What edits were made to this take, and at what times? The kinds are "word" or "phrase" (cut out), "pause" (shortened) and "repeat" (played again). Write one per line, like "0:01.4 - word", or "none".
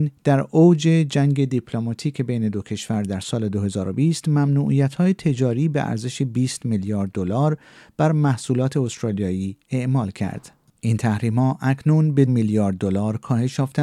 0:12.3 - word